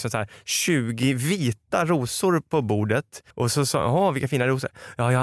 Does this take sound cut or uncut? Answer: cut